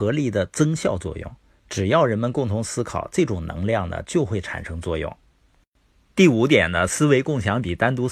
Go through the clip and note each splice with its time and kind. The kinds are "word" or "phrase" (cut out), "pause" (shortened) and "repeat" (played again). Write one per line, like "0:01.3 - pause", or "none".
0:01.5 - pause